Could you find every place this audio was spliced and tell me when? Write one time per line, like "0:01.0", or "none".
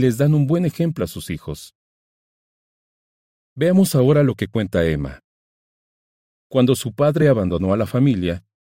none